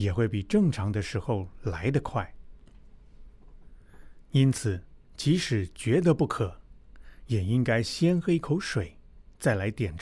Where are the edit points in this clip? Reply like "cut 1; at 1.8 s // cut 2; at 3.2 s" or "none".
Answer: cut 1; at 5.0 s